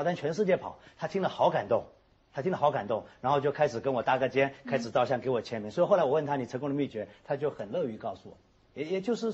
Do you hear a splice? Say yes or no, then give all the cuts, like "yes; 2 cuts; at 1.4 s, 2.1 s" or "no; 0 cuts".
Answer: no; 0 cuts